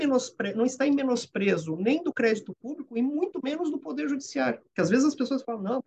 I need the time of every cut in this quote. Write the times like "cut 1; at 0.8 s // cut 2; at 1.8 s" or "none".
none